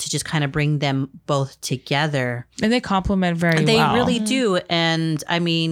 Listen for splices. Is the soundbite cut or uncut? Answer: uncut